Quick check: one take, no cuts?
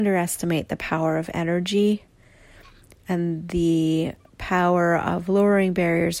yes; 0 cuts

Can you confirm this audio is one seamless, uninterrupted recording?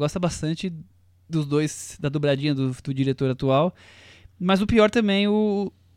yes; 0 cuts

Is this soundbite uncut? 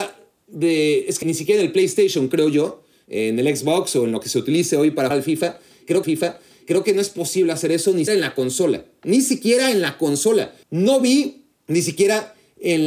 no; 5 cuts; at 1.2 s, 5.1 s, 6.0 s, 8.1 s, 10.6 s

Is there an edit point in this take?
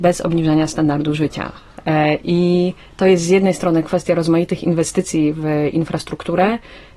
no; 0 cuts

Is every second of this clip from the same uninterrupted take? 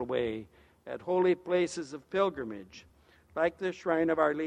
yes; 0 cuts

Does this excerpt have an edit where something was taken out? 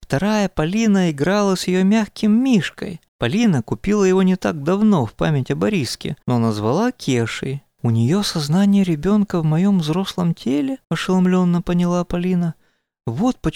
yes; 3 cuts; at 3.1 s, 6.2 s, 10.8 s

